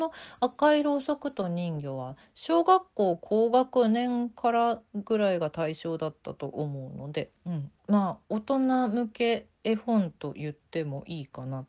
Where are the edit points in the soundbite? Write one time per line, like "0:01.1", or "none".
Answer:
0:07.4
0:07.8